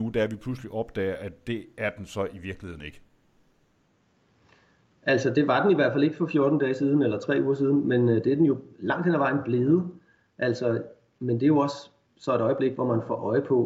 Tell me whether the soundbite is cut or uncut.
uncut